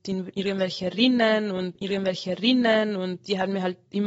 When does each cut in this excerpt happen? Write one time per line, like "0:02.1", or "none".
0:01.8